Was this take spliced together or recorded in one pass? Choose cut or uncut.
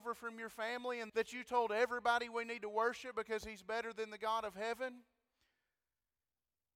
cut